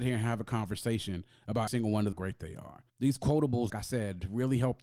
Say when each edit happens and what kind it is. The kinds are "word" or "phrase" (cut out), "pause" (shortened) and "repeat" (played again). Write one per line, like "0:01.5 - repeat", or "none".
0:01.7 - word
0:02.1 - phrase
0:02.9 - pause
0:03.7 - phrase